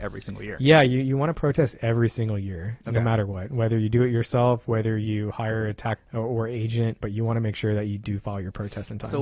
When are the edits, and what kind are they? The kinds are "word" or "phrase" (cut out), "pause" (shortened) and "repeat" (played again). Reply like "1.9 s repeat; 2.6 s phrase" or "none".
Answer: 6.0 s word; 7.0 s word